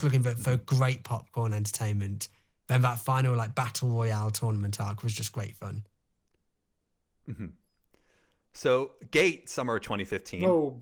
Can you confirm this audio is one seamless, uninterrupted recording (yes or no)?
yes